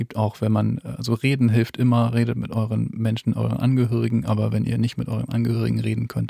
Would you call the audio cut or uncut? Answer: uncut